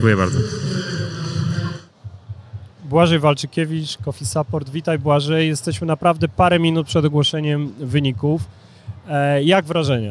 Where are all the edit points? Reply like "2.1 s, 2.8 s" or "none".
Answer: none